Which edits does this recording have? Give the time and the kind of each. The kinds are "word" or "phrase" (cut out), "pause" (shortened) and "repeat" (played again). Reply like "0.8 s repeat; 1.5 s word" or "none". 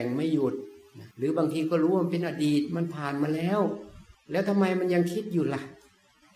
1.1 s pause; 4.1 s pause